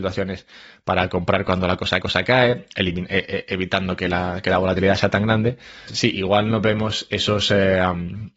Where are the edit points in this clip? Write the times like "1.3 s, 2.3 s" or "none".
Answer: 2.0 s, 5.9 s